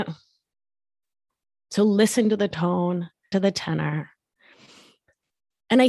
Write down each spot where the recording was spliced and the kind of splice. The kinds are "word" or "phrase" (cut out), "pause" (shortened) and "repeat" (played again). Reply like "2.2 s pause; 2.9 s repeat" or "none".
3.3 s word